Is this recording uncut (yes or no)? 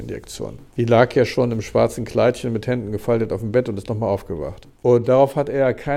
yes